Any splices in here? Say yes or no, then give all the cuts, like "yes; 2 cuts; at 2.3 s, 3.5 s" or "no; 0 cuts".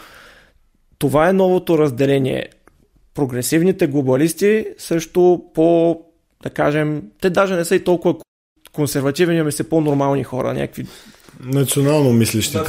no; 0 cuts